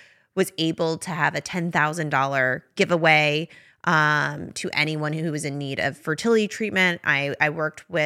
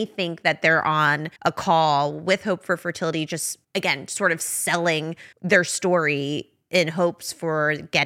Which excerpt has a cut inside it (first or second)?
second